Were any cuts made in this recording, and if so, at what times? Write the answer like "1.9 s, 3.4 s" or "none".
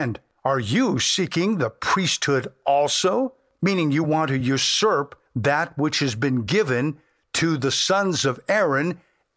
none